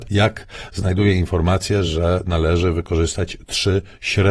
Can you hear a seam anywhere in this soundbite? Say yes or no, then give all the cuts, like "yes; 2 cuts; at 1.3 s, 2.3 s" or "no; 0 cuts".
no; 0 cuts